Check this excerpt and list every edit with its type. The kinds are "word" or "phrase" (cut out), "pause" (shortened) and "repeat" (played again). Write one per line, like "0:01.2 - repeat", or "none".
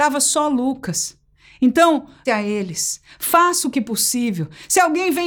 0:02.3 - word